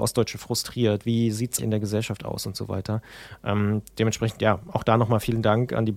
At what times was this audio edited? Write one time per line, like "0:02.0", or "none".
0:01.6